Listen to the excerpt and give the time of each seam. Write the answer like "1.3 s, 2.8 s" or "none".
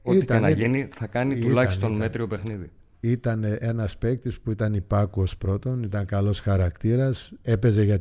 none